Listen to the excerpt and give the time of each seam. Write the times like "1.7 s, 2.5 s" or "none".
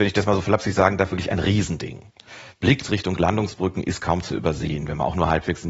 none

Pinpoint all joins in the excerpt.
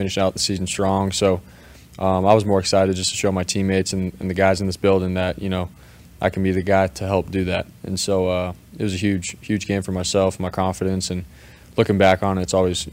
none

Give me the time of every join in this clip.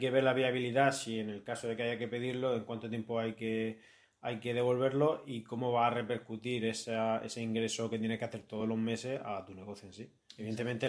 none

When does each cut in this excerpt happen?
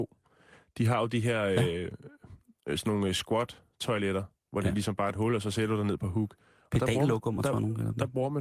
none

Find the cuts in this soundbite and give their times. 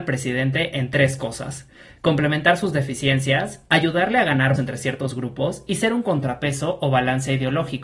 4.6 s

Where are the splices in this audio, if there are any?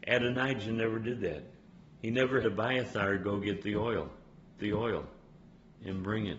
1.7 s, 2.4 s, 4.6 s

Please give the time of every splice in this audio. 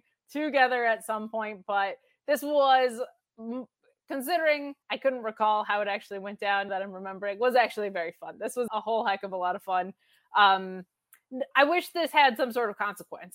4.8 s, 6.7 s, 8.7 s

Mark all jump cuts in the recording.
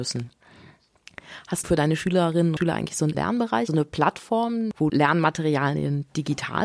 1.6 s, 2.6 s, 3.1 s, 3.7 s, 4.9 s

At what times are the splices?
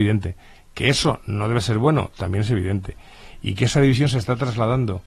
none

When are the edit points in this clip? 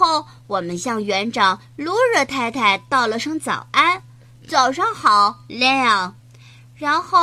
6.2 s

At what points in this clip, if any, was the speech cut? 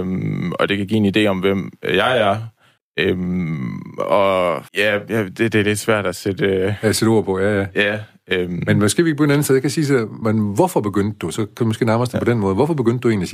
2.8 s, 4.7 s, 10.2 s

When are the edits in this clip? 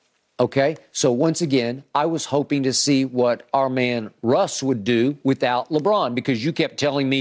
none

